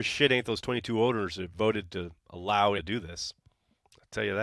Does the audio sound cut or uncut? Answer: cut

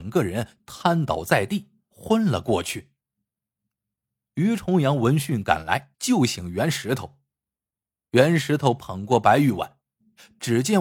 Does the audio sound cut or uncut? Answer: cut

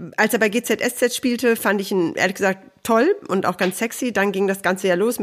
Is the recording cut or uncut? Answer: uncut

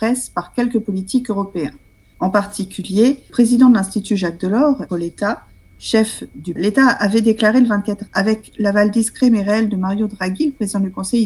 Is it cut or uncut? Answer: cut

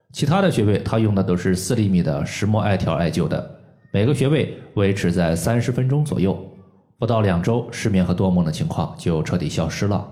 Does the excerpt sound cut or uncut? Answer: uncut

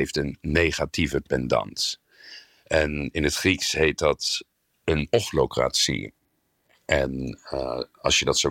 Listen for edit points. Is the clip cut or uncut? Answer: uncut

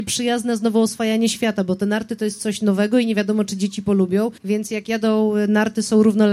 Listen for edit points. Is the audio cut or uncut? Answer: cut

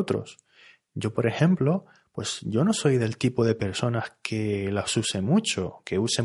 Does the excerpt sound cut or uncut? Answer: uncut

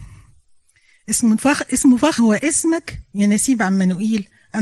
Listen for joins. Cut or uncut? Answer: cut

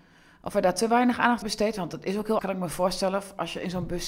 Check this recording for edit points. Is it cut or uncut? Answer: cut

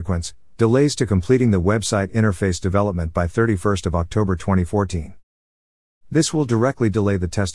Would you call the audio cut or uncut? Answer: uncut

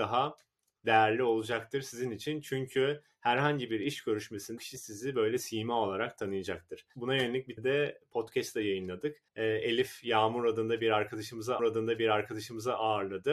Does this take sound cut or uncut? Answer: cut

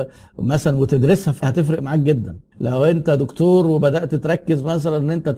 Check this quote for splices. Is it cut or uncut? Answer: cut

